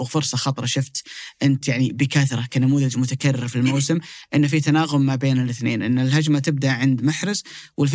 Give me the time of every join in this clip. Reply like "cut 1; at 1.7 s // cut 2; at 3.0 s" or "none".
none